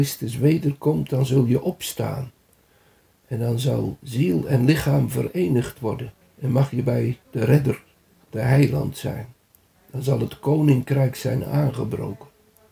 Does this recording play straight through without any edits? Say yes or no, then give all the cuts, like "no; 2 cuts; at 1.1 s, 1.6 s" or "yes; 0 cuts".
no; 2 cuts; at 6.2 s, 7.2 s